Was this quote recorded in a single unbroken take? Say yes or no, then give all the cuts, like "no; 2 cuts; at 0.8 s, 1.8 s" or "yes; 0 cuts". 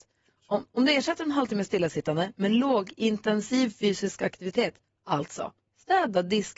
yes; 0 cuts